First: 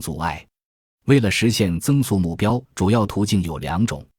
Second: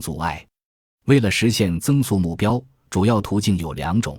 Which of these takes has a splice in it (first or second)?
first